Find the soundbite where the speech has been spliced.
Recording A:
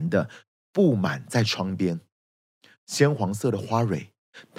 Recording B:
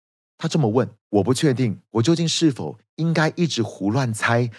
B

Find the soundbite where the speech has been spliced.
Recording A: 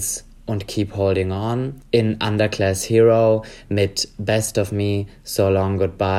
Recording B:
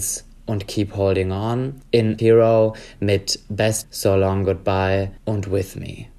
B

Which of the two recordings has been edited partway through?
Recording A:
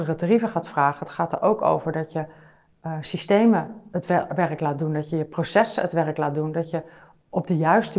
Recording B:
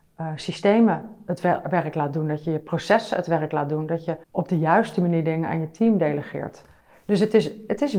B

